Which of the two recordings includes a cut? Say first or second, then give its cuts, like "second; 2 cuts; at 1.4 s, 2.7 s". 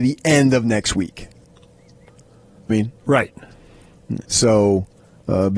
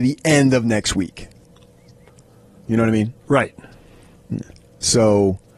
first; 2 cuts; at 2.7 s, 4.2 s